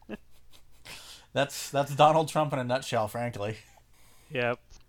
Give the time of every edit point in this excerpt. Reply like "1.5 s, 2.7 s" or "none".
none